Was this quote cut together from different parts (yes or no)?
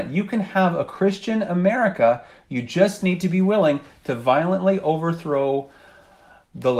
no